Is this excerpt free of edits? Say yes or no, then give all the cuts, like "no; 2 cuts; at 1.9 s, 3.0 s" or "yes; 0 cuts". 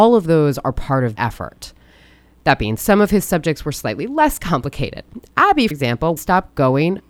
no; 4 cuts; at 1.2 s, 2.8 s, 5.7 s, 6.2 s